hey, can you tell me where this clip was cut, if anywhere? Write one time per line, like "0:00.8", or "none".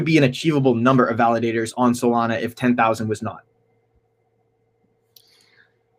none

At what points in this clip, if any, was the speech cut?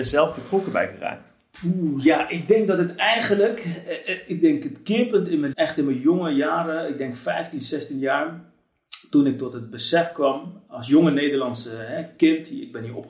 0:05.5

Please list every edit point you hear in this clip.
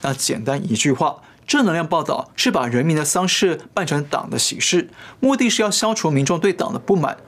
none

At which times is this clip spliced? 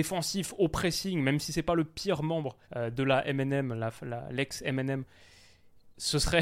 0:02.6

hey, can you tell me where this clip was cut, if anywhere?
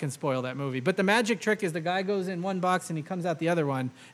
none

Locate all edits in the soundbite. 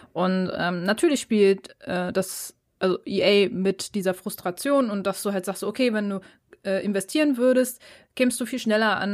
none

